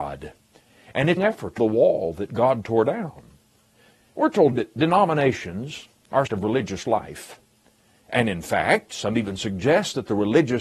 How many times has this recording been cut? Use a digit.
4